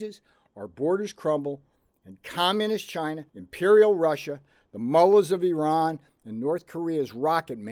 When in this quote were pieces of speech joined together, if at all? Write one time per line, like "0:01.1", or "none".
0:03.3